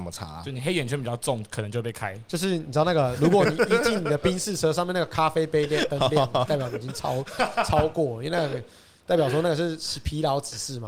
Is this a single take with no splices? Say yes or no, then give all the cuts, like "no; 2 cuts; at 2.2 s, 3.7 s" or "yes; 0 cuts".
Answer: yes; 0 cuts